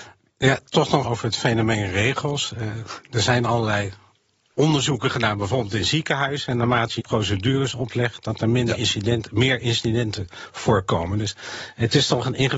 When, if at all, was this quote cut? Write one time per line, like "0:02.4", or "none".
0:01.0
0:07.0